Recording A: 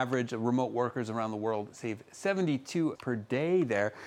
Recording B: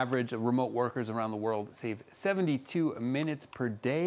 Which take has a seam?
A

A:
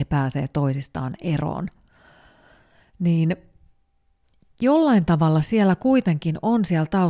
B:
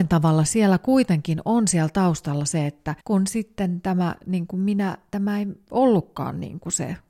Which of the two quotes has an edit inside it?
B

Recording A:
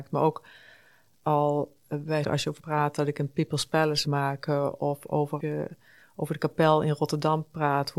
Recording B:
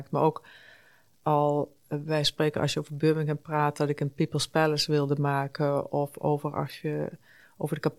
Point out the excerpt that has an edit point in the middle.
A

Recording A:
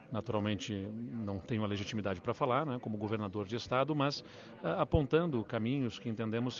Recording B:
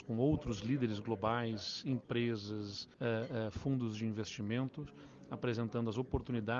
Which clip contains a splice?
B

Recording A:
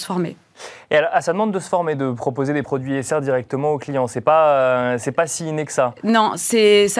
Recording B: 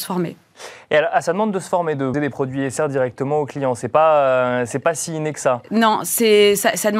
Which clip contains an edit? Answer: B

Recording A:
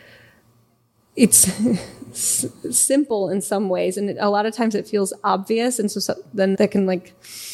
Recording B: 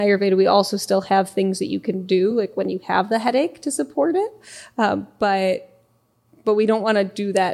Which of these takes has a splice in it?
A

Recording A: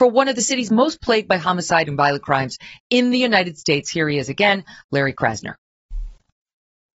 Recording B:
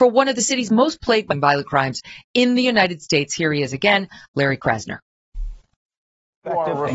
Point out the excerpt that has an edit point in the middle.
B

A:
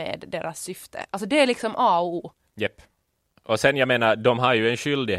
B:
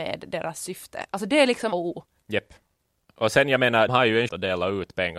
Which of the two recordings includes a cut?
B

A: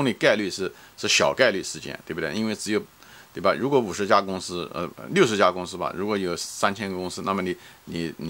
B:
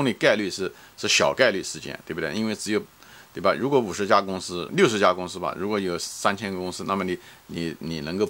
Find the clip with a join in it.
B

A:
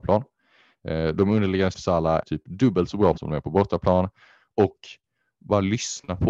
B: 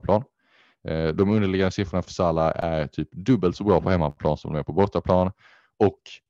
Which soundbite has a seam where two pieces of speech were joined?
A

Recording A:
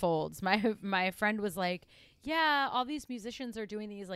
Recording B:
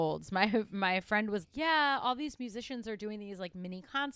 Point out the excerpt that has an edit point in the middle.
B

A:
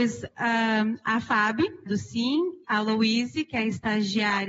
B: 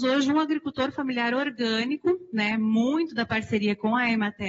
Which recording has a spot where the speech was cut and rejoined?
A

